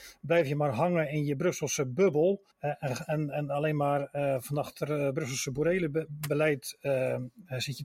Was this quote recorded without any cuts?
no; 1 cut; at 2.5 s

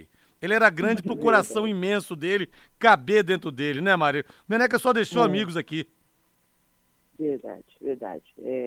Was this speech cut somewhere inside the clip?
no; 0 cuts

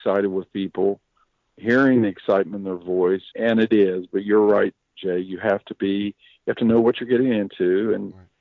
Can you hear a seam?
yes; 1 cut; at 3.3 s

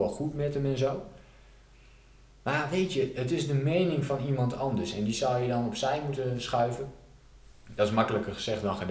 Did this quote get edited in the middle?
no; 0 cuts

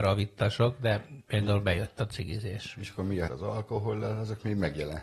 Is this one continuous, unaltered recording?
no; 1 cut; at 3.3 s

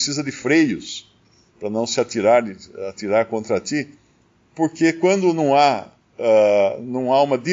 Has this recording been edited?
no; 0 cuts

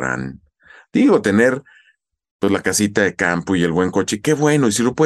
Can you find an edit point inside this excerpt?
no; 0 cuts

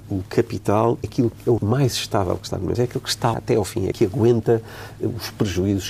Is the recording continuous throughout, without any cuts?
no; 5 cuts; at 1.0 s, 1.6 s, 2.7 s, 3.3 s, 3.9 s

